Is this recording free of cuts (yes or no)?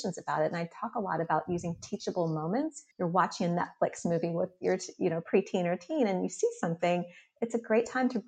no